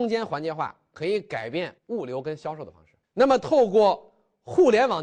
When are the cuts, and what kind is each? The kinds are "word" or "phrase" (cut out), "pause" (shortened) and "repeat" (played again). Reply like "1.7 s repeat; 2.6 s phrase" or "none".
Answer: 1.8 s pause; 3.0 s pause